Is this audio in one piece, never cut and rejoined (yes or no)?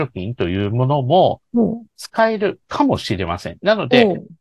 no